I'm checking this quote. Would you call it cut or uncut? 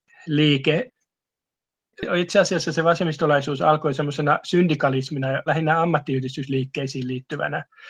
cut